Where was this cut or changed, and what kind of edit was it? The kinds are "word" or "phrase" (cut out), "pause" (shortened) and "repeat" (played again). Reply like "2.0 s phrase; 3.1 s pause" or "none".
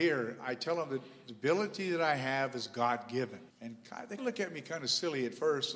3.5 s pause; 4.2 s word